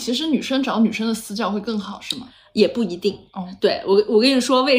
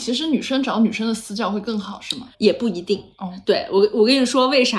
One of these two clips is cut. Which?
second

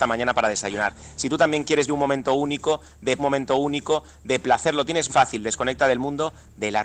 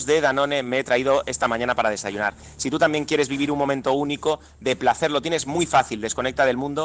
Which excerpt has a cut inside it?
first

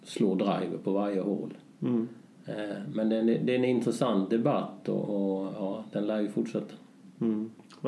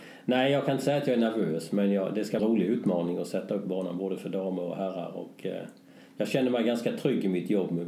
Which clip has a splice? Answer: second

